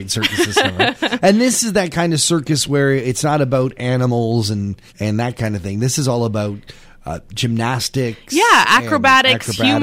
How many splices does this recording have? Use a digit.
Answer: 1